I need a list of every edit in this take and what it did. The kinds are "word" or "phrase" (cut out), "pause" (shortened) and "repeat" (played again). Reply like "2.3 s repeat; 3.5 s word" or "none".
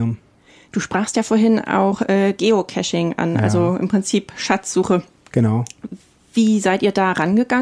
none